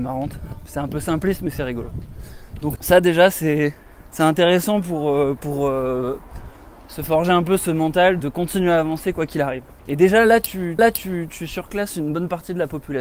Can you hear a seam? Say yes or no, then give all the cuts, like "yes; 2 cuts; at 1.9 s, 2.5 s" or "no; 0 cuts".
yes; 6 cuts; at 2.8 s, 4.1 s, 5.4 s, 8.2 s, 9.8 s, 10.8 s